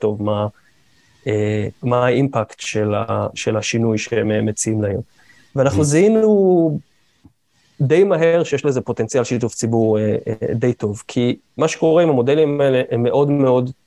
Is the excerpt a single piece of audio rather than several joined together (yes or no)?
yes